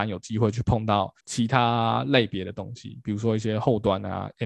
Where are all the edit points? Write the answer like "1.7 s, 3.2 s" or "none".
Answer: 1.2 s